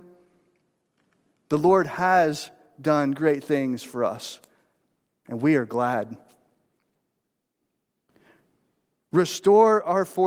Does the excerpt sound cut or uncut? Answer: uncut